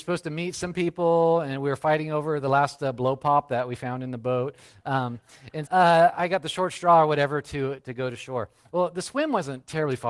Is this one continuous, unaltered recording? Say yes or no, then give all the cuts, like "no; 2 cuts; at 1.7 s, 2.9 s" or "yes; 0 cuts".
no; 1 cut; at 5.7 s